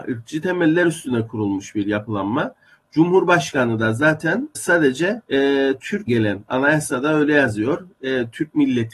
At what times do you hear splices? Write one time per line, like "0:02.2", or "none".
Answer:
0:04.5
0:05.2
0:06.1